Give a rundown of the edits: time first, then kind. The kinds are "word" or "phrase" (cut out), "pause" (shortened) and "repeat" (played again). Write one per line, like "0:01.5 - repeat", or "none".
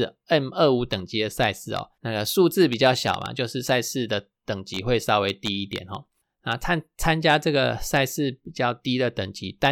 0:02.0 - pause